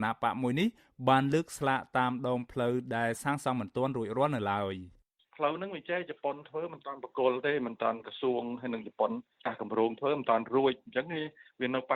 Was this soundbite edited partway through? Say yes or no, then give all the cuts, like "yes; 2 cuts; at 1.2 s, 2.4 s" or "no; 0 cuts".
no; 0 cuts